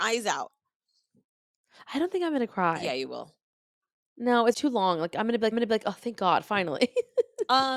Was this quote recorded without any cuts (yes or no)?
no